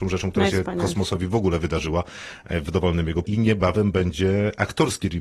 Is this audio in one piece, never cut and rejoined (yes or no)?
no